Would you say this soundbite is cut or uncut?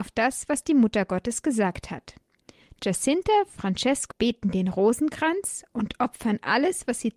cut